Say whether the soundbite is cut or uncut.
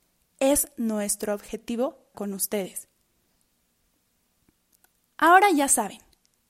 cut